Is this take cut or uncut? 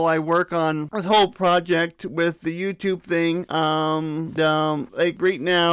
cut